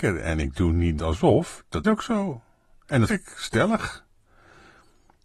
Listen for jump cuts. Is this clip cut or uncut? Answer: cut